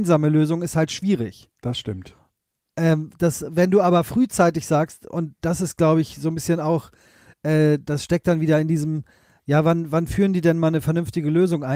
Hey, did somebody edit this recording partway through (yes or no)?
no